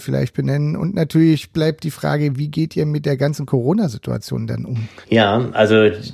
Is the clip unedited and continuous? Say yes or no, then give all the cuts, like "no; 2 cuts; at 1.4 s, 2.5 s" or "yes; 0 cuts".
no; 1 cut; at 5.0 s